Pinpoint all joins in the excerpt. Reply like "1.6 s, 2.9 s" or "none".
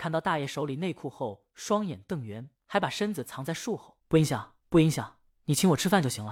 2.5 s, 4.0 s, 4.6 s, 5.3 s

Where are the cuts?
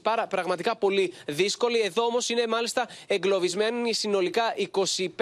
none

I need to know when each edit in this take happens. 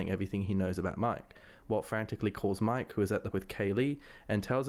3.3 s

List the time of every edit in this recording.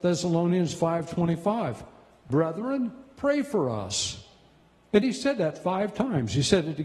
none

